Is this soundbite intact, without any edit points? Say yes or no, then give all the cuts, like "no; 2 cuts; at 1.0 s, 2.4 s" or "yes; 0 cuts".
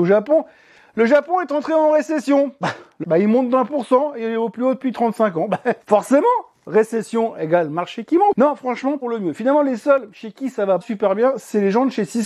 no; 4 cuts; at 3.0 s, 5.8 s, 9.0 s, 10.8 s